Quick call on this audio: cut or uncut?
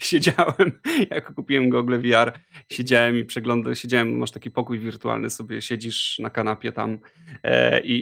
uncut